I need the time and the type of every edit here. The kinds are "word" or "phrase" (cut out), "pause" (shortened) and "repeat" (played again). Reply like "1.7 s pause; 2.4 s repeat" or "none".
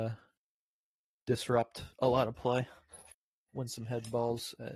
1.9 s pause

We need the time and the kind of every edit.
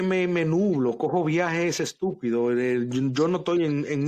none

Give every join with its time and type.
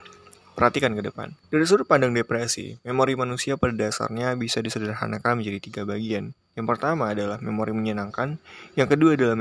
1.4 s pause

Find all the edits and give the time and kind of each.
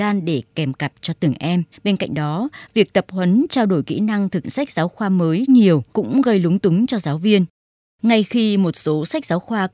1.7 s pause; 4.4 s word; 5.5 s phrase; 5.9 s pause

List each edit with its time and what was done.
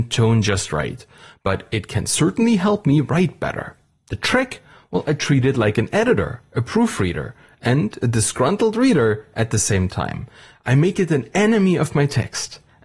none

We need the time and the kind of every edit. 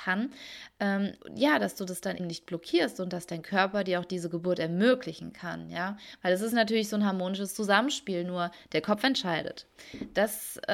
1.2 s pause; 2.2 s word

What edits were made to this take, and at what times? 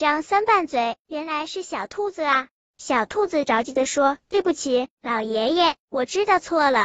2.6 s pause

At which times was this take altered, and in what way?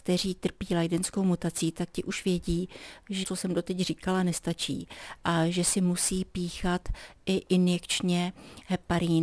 3.2 s word

